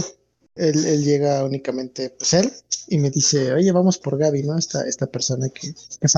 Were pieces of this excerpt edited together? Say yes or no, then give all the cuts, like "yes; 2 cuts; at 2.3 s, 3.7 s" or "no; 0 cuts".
yes; 1 cut; at 4.0 s